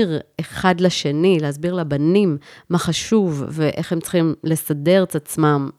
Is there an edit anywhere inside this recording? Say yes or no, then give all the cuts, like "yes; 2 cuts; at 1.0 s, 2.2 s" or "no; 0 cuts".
no; 0 cuts